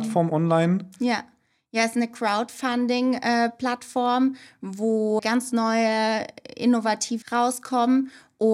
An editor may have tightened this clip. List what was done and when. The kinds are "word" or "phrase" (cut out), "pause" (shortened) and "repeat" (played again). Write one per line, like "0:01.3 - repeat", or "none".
0:05.2 - word
0:07.2 - word